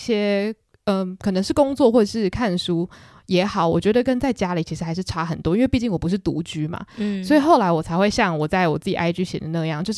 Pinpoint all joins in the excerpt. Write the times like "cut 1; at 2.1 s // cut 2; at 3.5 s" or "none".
none